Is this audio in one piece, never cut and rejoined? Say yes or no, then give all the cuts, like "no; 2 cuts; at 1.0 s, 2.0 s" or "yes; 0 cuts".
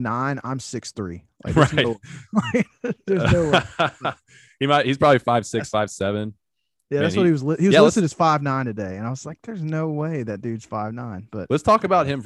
yes; 0 cuts